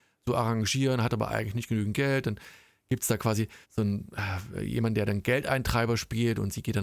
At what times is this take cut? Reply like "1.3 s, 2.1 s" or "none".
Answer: 3.6 s